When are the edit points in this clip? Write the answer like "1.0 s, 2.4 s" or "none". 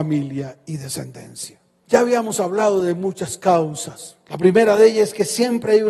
none